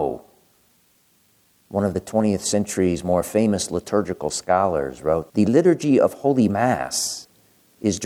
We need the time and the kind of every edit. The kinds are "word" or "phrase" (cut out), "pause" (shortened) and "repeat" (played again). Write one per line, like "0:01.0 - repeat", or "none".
0:05.3 - word